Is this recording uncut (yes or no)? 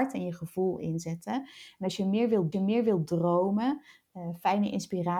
no